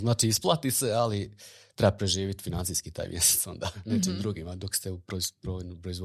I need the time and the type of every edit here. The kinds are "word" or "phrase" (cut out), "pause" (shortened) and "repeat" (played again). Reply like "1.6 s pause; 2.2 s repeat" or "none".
none